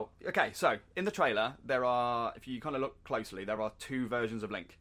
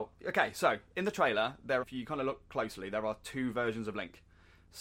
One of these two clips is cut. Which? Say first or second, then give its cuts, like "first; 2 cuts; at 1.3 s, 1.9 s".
second; 1 cut; at 1.8 s